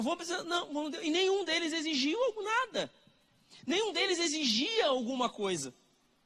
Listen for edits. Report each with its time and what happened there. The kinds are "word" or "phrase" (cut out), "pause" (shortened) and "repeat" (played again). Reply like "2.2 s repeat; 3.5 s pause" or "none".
none